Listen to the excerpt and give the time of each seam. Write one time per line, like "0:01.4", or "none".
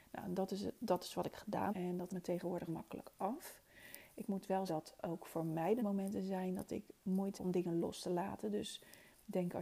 0:01.7
0:02.1
0:02.7
0:04.7
0:05.8
0:07.3